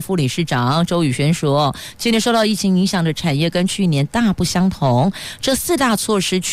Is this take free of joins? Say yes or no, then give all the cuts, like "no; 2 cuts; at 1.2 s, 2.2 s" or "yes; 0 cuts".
yes; 0 cuts